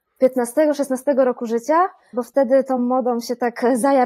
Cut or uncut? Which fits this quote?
uncut